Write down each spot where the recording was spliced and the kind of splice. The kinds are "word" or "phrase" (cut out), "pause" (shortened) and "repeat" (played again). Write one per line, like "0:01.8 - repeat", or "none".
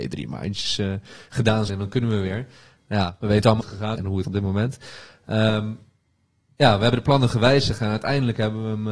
0:01.7 - word
0:03.6 - word
0:03.9 - word
0:04.2 - word